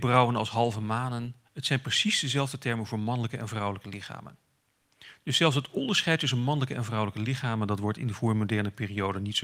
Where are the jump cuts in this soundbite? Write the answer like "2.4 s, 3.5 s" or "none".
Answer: 1.4 s